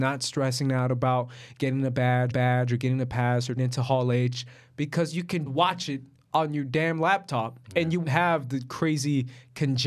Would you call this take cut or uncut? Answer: cut